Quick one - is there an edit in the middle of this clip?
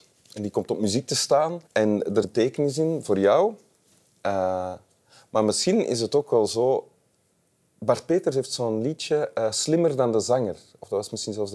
yes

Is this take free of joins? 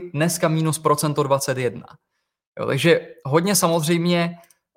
yes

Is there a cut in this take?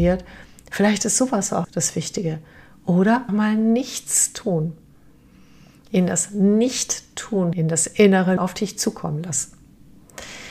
yes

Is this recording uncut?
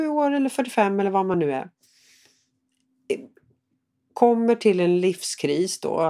yes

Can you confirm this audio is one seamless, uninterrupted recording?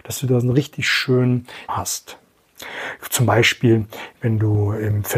no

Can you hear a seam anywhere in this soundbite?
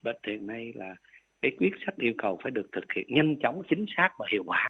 no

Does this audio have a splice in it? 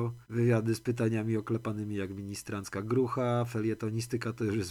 no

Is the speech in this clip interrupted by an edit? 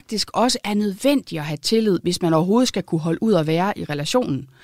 no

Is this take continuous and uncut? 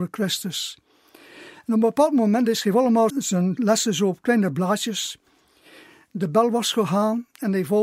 no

